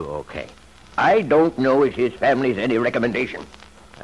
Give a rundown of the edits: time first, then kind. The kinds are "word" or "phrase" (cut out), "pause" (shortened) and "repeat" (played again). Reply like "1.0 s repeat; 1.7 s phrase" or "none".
none